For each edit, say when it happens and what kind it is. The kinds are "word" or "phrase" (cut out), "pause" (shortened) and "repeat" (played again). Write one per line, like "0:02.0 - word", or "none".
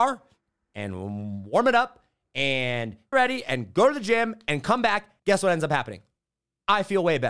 0:03.1 - word
0:05.2 - pause